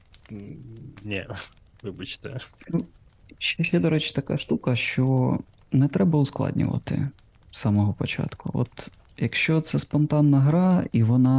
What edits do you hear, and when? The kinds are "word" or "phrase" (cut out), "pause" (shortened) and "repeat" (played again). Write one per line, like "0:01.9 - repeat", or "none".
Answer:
none